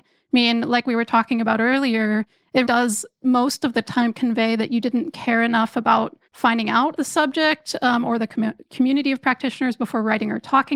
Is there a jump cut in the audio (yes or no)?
yes